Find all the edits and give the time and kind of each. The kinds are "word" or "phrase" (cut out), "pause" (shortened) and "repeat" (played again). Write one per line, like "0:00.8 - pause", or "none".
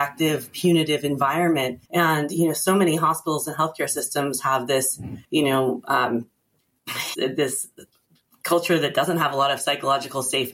0:01.9 - pause
0:05.2 - pause
0:07.1 - phrase